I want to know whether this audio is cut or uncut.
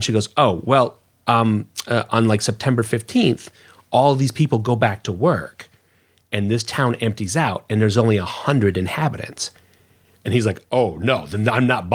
uncut